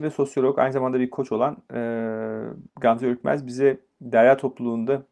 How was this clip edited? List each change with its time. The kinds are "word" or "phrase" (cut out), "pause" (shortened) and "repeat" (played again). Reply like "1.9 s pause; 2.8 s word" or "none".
2.7 s pause